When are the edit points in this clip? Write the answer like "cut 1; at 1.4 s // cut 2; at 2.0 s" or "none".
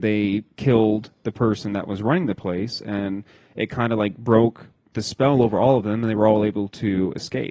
none